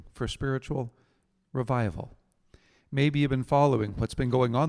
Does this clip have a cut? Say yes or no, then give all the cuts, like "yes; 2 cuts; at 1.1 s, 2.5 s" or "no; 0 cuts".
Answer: no; 0 cuts